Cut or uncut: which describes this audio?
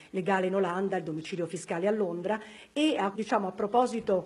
cut